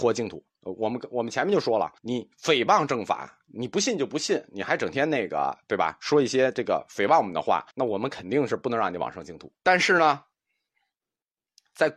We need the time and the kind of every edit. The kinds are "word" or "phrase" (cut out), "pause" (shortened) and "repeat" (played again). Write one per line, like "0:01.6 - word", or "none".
0:02.0 - pause
0:07.7 - pause
0:09.6 - pause